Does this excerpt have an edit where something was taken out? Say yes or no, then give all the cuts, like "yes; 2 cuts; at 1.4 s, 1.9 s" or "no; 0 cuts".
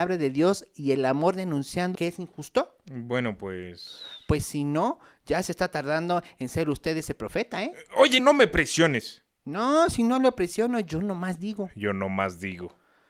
yes; 2 cuts; at 1.9 s, 8.2 s